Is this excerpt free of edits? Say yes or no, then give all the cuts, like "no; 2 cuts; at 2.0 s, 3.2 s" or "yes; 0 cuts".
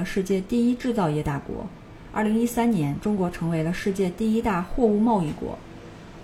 yes; 0 cuts